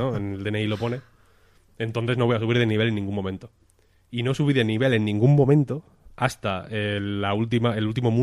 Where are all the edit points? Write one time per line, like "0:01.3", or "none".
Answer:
none

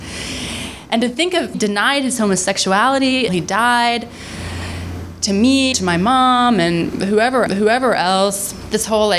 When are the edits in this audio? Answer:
0:01.5
0:03.3
0:05.7
0:07.5

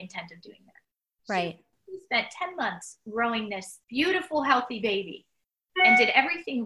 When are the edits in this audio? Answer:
0:03.8

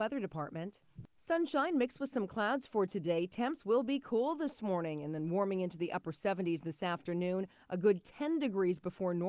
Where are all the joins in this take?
none

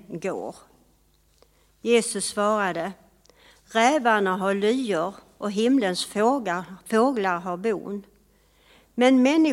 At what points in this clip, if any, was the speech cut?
none

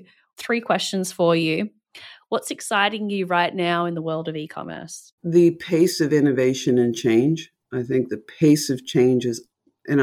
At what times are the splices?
0:05.2

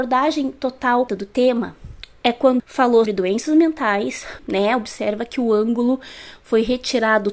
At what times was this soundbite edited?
0:01.1
0:02.6
0:03.1
0:04.4

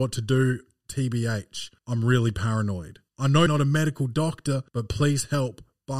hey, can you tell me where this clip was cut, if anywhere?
0:01.8
0:03.1
0:03.5
0:04.7

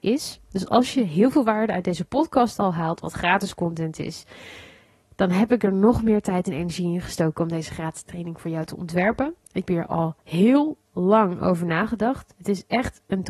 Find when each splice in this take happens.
0:09.7

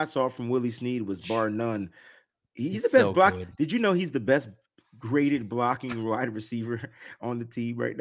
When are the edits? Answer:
none

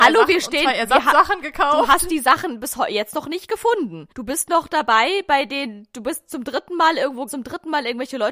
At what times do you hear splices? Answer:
0:04.1
0:07.3

